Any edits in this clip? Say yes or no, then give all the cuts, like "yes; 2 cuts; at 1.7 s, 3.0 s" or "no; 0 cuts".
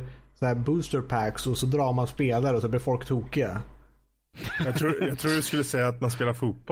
no; 0 cuts